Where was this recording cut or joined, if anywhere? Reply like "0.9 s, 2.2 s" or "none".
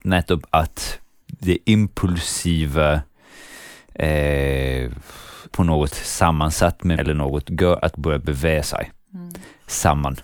1.2 s, 5.5 s, 5.9 s, 7.0 s, 7.9 s